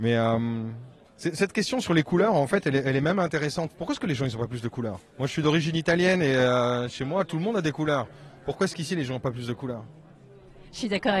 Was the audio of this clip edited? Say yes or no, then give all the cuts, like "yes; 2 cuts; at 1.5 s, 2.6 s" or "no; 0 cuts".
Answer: no; 0 cuts